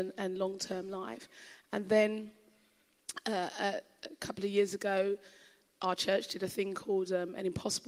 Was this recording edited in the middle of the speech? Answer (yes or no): no